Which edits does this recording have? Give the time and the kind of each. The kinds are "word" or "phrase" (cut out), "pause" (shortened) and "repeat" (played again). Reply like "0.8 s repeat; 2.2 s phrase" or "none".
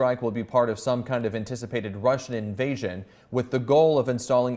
none